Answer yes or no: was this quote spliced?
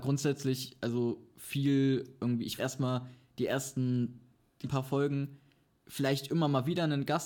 yes